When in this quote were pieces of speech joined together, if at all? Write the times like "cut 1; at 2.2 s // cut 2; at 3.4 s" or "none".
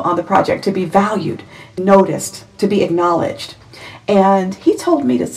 cut 1; at 1.8 s